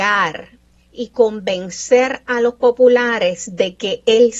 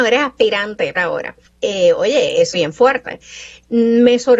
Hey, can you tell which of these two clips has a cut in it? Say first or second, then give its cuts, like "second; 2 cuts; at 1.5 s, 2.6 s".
second; 3 cuts; at 1.0 s, 1.5 s, 2.5 s